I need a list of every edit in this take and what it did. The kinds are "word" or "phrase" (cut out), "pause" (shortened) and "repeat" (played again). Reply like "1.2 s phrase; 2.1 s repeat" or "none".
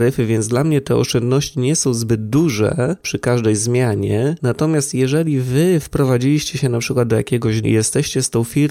7.6 s word